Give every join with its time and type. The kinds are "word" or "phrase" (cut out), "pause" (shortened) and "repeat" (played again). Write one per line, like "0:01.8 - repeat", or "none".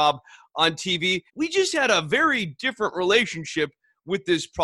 0:01.3 - pause